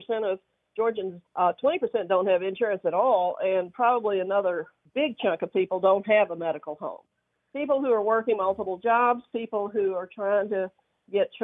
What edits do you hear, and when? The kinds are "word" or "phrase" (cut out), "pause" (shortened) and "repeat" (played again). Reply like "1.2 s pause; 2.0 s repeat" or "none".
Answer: 1.3 s pause; 4.9 s pause